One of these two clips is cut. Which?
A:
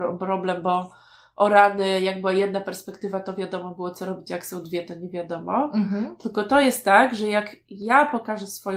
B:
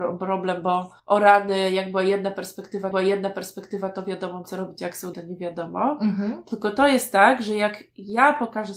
B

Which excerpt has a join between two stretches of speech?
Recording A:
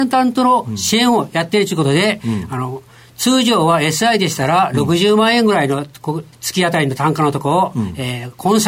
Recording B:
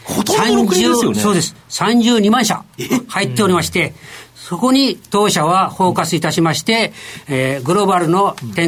A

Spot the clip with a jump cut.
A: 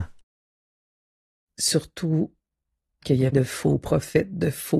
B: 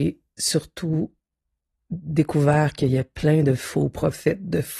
A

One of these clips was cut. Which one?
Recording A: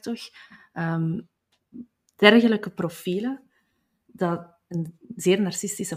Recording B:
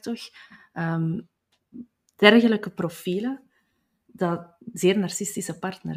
B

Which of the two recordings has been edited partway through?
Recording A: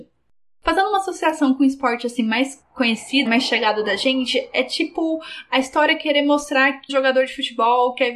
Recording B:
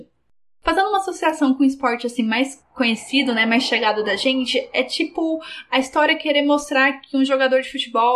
A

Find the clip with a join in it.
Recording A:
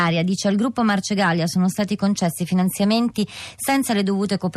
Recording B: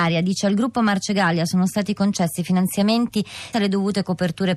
B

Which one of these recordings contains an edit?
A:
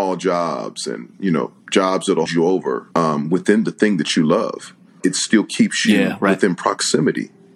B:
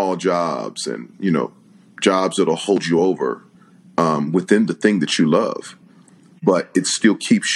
A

